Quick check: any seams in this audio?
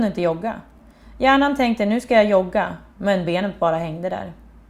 no; 0 cuts

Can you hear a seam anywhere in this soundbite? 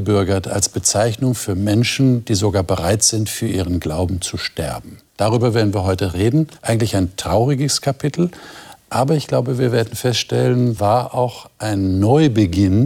yes; 3 cuts; at 5.1 s, 6.6 s, 10.8 s

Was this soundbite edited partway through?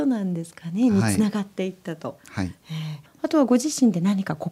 yes; 1 cut; at 2.2 s

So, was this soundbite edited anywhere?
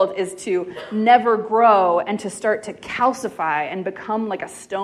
no; 0 cuts

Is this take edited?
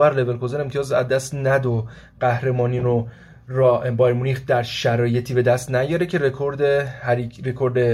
no; 0 cuts

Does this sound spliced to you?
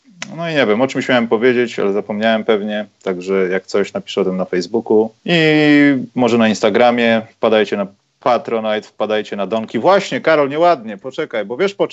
yes; 2 cuts; at 5.2 s, 8.0 s

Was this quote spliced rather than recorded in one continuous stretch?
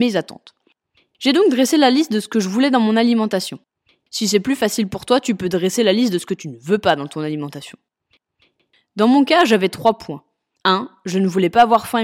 no; 0 cuts

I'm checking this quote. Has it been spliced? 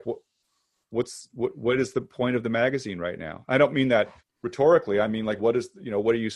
yes; 2 cuts; at 4.2 s, 5.4 s

